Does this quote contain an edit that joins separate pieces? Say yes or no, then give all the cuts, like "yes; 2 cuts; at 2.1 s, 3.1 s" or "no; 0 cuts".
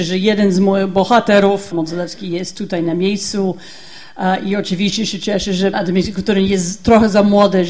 yes; 2 cuts; at 1.7 s, 5.7 s